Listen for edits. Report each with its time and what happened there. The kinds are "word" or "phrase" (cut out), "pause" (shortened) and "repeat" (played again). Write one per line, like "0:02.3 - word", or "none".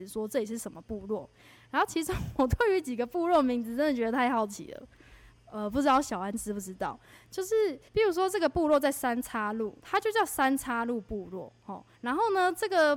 0:07.9 - pause
0:09.8 - pause
0:11.9 - pause